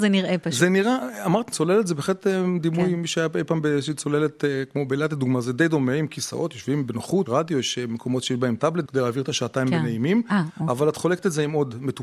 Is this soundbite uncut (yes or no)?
no